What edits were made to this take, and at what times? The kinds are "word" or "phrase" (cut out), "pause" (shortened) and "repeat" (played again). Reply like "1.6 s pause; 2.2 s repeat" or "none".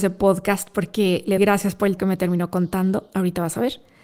1.4 s word; 2.0 s word